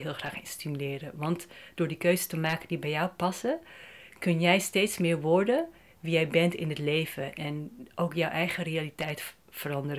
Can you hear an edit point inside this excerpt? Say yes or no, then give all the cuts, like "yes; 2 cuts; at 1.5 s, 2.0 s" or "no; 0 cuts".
no; 0 cuts